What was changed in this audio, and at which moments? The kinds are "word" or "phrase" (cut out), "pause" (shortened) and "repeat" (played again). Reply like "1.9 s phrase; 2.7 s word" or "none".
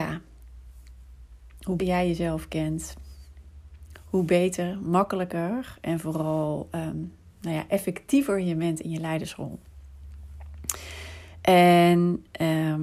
1.8 s word